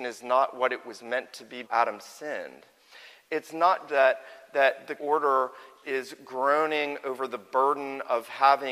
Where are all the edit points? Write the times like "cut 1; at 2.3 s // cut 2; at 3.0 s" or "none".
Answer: cut 1; at 1.6 s // cut 2; at 3.9 s // cut 3; at 5.0 s // cut 4; at 5.8 s